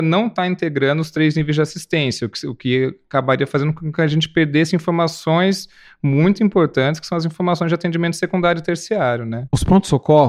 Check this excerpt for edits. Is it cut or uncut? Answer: uncut